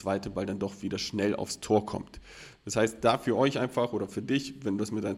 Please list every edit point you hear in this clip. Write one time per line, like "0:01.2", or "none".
none